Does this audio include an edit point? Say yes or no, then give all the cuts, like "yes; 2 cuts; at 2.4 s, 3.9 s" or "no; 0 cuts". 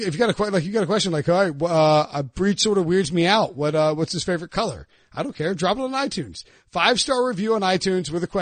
no; 0 cuts